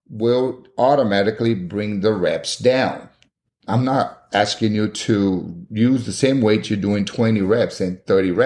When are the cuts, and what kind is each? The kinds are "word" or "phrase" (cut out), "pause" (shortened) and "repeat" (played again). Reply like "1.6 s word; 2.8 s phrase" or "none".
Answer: none